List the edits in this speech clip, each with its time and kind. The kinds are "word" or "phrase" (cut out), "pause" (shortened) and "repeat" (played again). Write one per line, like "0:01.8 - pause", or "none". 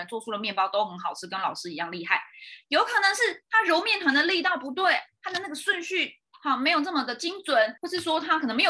0:07.8 - pause